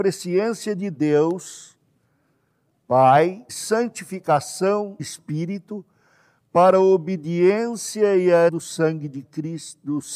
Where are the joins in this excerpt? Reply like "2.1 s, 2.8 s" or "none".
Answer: 3.5 s, 5.0 s, 8.5 s